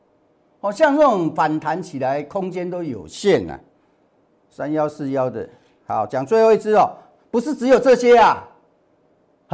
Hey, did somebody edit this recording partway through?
no; 0 cuts

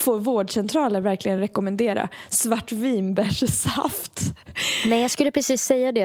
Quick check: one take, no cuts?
yes; 0 cuts

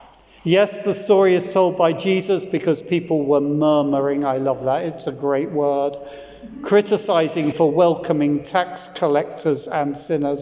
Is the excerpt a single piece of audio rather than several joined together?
no; 1 cut; at 7.5 s

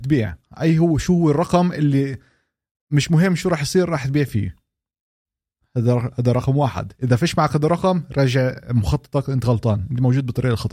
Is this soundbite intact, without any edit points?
yes; 0 cuts

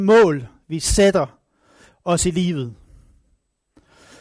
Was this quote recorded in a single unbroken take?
yes; 0 cuts

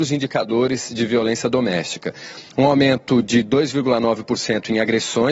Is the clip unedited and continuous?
yes; 0 cuts

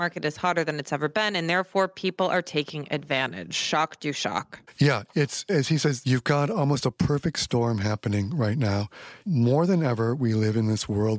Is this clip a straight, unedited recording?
yes; 0 cuts

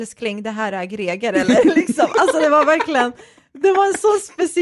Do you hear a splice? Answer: no; 0 cuts

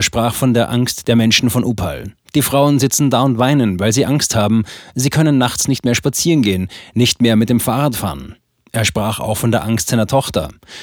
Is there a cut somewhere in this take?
no; 0 cuts

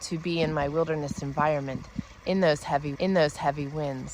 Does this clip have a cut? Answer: yes; 1 cut; at 3.0 s

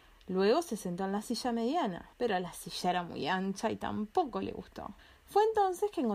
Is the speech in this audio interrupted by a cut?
yes; 2 cuts; at 2.1 s, 5.0 s

